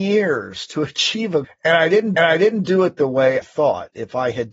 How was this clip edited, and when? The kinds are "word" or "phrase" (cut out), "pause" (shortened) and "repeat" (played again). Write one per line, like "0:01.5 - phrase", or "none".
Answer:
0:01.4 - word
0:02.2 - repeat
0:03.4 - word